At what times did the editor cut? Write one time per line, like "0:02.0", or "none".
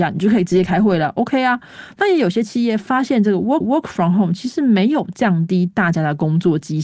0:03.6